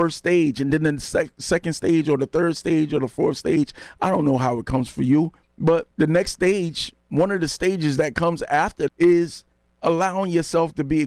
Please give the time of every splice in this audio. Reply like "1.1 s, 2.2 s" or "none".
5.9 s, 8.9 s